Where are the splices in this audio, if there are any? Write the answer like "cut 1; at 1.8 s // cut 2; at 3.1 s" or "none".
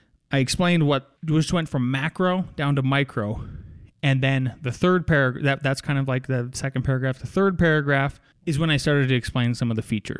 cut 1; at 1.2 s // cut 2; at 8.3 s